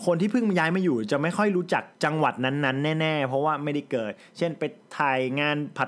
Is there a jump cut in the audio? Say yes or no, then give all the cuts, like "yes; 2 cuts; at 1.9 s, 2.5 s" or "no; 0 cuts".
yes; 1 cut; at 1.9 s